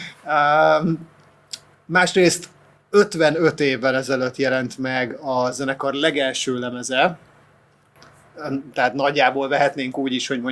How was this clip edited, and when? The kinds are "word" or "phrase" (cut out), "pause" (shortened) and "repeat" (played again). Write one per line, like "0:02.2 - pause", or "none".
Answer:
none